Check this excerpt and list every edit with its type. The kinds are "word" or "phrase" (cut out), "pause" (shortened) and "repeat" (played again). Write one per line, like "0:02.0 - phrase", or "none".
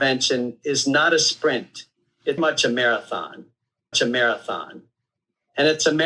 0:02.4 - word
0:03.9 - repeat